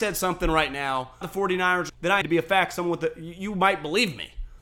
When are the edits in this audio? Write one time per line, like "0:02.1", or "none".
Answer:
0:01.2
0:01.9
0:02.2